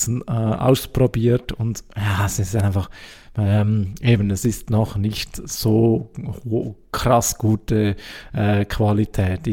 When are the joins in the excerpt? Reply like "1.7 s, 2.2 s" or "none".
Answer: none